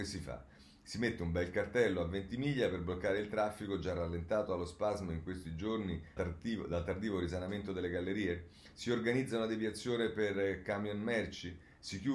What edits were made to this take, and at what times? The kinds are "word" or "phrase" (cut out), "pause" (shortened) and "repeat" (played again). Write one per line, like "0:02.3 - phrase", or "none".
0:06.2 - word